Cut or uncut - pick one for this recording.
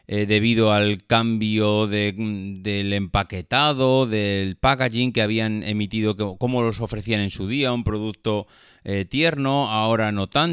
uncut